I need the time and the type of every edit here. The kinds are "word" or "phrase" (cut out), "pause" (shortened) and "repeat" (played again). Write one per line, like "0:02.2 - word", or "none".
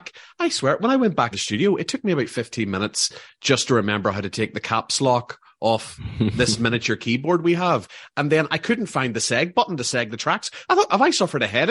0:01.3 - word